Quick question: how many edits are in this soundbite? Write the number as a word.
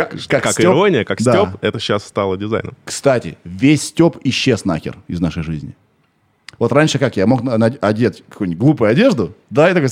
zero